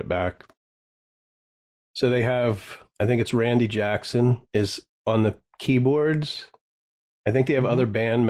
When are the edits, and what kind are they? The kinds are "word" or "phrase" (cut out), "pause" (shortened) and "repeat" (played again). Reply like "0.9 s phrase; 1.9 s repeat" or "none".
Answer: 2.9 s pause; 4.4 s pause; 5.5 s pause